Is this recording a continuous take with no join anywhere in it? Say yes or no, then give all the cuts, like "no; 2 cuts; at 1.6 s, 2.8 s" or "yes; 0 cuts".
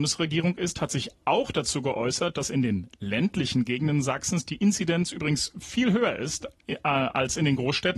yes; 0 cuts